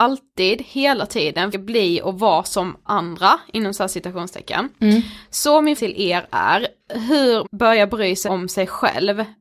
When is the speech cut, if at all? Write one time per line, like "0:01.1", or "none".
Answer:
0:01.5
0:02.9
0:05.8
0:07.4
0:08.3